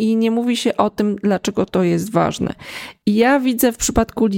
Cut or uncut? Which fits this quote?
uncut